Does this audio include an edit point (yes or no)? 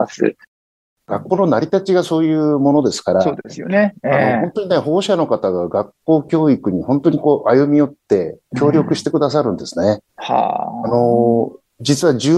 yes